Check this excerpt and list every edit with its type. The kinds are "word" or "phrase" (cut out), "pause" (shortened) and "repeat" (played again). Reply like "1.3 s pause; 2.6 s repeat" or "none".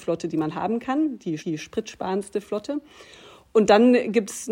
1.4 s repeat

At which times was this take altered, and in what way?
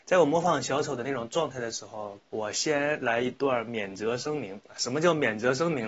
2.2 s pause

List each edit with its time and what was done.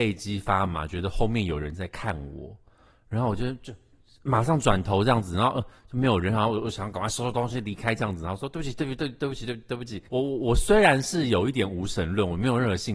10.1 s pause

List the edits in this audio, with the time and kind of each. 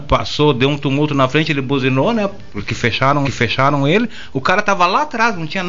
3.2 s repeat

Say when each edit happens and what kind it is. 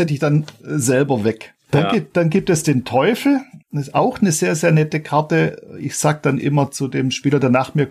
3.6 s pause

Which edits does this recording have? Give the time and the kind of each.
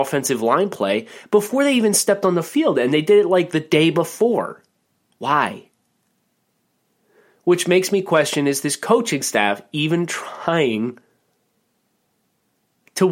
4.8 s pause

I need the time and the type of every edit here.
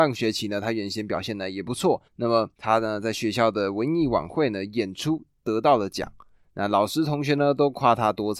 2.1 s pause; 2.5 s pause

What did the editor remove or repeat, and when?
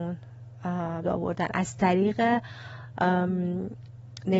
1.0 s phrase

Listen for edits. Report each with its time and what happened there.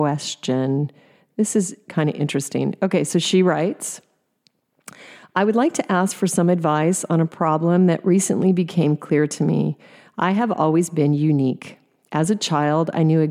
none

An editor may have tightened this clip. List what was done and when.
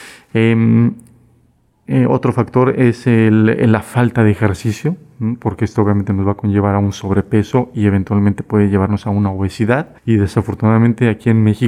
10.0 s pause

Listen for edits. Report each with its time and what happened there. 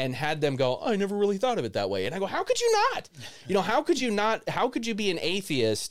none

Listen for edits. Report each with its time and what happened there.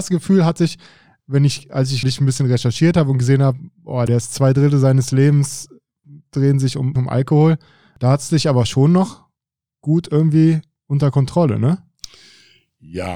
2.0 s word

